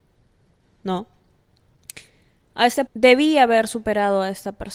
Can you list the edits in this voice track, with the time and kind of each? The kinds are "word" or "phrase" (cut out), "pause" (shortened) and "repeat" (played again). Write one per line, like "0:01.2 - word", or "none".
0:02.9 - word